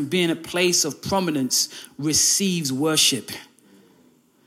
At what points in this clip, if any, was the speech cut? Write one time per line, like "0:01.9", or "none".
none

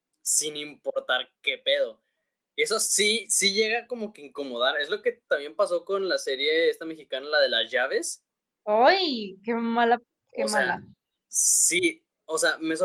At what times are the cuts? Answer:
0:01.3
0:11.1

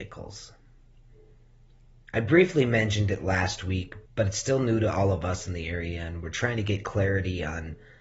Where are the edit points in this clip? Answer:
0:04.1

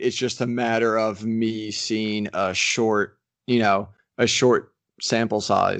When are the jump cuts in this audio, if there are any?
none

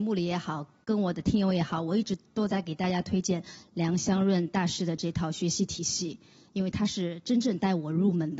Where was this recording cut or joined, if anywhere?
none

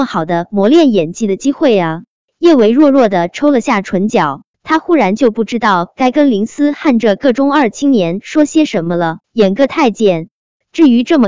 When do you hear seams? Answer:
0:02.2
0:04.5
0:09.2

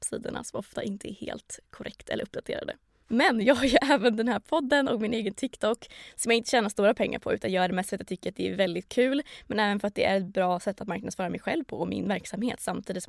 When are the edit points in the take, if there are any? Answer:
none

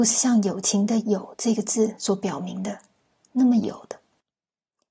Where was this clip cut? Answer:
none

